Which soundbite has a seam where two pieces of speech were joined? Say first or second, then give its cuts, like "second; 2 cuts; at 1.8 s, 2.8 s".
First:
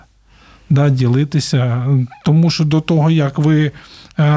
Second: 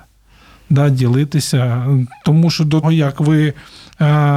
second; 1 cut; at 2.8 s